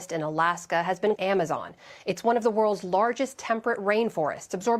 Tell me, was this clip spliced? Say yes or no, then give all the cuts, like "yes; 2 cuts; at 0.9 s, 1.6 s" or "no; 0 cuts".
yes; 1 cut; at 1.2 s